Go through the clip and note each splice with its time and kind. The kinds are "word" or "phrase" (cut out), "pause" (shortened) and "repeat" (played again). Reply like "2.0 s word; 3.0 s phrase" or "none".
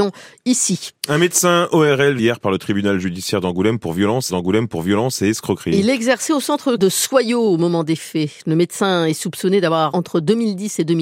2.2 s word; 4.3 s repeat; 6.8 s word; 9.9 s word